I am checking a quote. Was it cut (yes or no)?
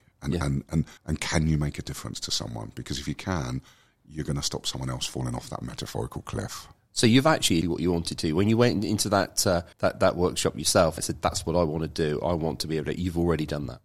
yes